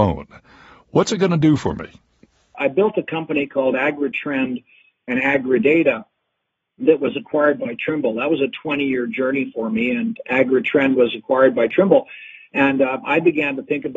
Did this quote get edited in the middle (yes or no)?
yes